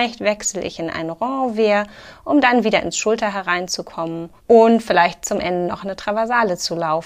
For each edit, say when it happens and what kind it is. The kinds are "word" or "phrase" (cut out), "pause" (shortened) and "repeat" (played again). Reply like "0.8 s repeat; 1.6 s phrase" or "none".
4.4 s pause